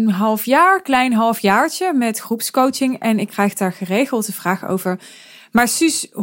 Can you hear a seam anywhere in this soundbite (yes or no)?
no